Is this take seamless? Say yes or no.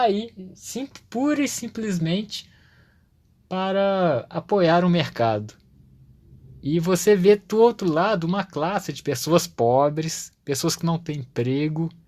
yes